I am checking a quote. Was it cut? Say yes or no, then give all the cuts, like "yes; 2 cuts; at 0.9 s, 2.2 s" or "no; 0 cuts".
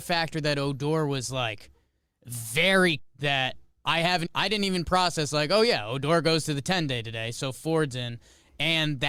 yes; 2 cuts; at 3.0 s, 4.3 s